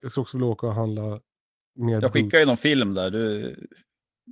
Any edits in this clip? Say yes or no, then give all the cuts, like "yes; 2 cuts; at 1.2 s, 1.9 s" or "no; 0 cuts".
no; 0 cuts